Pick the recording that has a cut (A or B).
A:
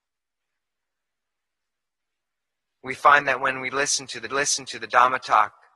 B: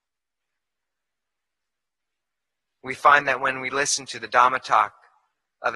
A